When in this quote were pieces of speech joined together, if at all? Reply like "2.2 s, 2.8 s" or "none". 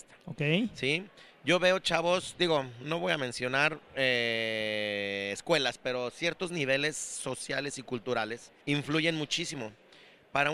8.6 s